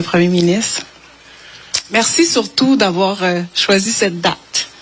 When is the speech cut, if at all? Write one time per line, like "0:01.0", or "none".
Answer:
none